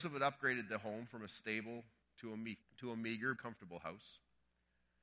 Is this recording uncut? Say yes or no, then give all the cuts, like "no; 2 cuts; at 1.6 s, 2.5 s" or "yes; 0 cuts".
no; 3 cuts; at 2.0 s, 2.6 s, 3.4 s